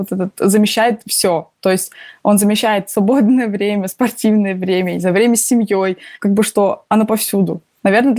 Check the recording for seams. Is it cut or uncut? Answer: uncut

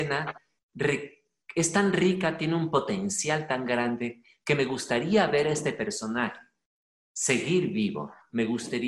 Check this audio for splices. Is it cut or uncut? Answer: uncut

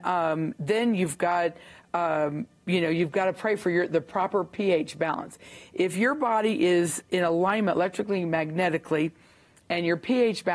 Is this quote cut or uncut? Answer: uncut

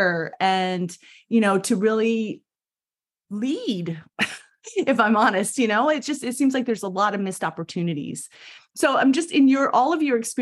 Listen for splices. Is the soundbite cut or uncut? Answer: uncut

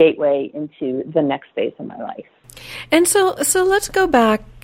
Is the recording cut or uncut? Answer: uncut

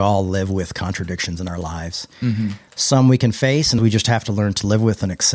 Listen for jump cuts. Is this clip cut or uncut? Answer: cut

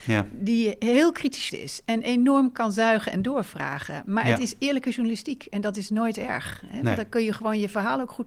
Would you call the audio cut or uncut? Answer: cut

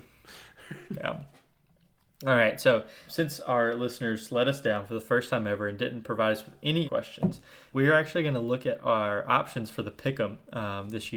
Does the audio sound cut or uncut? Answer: cut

